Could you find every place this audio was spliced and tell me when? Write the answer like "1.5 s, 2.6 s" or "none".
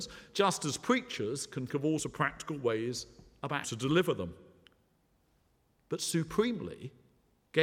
1.7 s, 2.0 s, 3.6 s